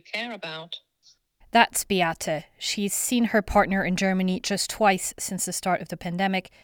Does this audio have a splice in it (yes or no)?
no